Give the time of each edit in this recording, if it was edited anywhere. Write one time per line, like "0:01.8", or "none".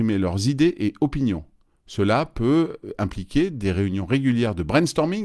none